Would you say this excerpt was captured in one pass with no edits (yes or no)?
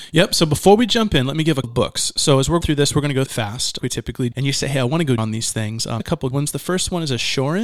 no